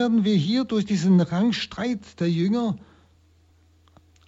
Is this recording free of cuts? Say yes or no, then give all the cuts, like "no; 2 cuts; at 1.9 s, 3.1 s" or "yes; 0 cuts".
yes; 0 cuts